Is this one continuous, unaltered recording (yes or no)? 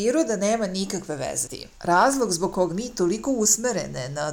no